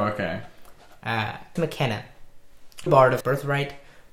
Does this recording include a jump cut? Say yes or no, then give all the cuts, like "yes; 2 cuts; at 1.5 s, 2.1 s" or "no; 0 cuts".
yes; 3 cuts; at 1.6 s, 2.9 s, 3.2 s